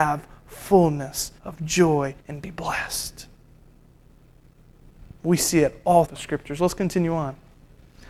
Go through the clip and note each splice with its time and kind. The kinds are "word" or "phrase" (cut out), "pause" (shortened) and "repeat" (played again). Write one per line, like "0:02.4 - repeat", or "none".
0:01.4 - pause
0:02.2 - pause
0:06.1 - word